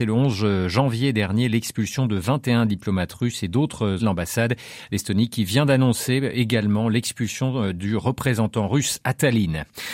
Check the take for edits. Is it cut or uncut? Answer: cut